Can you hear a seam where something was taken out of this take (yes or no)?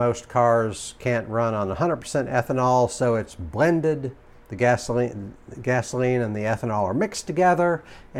no